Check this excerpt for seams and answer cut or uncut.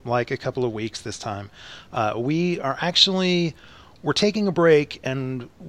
uncut